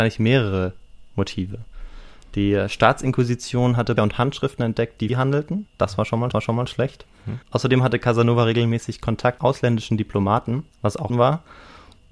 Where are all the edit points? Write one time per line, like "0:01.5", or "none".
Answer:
0:04.0
0:05.1
0:05.7
0:06.3
0:07.4
0:09.4
0:10.7
0:11.1